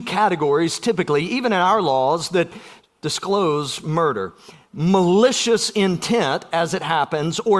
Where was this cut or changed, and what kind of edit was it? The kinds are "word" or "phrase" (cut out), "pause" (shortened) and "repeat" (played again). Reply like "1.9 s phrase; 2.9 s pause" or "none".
none